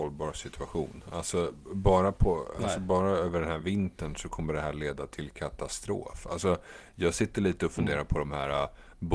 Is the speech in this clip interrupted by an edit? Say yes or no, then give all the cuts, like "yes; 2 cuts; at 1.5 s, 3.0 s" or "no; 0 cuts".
no; 0 cuts